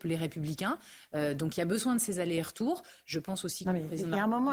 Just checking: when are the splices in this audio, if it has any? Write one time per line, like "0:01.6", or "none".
none